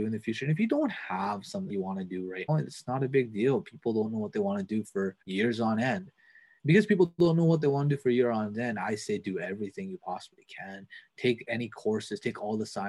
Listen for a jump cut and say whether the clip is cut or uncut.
cut